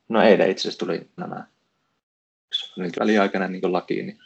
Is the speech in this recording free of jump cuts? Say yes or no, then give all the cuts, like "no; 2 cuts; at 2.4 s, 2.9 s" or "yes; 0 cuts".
no; 2 cuts; at 1.2 s, 3.0 s